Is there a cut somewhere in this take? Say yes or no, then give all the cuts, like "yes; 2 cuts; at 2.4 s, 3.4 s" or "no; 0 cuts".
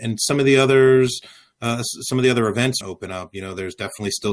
yes; 1 cut; at 2.8 s